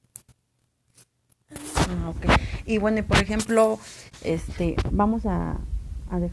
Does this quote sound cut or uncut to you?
uncut